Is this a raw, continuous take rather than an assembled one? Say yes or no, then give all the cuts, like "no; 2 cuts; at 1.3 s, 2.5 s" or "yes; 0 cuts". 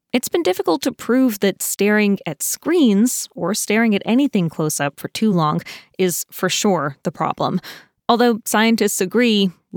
yes; 0 cuts